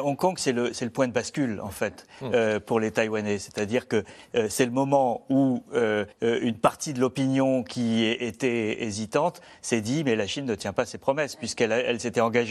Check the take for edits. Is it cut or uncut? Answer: cut